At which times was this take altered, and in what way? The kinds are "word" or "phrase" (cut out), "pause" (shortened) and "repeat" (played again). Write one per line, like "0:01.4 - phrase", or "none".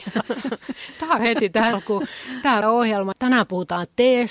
0:01.2 - phrase
0:01.7 - word
0:02.6 - word
0:03.1 - word